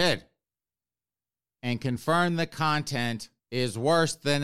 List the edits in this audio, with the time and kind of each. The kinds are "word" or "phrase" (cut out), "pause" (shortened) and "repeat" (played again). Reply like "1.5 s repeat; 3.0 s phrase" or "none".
3.4 s pause